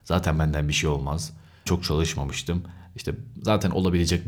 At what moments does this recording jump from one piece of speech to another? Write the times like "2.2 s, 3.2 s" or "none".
1.7 s